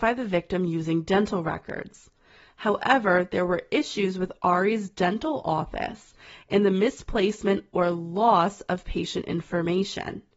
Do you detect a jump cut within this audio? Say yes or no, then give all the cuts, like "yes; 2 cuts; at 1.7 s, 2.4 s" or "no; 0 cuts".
no; 0 cuts